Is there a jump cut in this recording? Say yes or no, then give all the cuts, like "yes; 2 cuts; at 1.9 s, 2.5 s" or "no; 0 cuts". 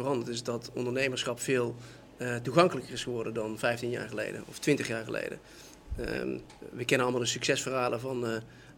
no; 0 cuts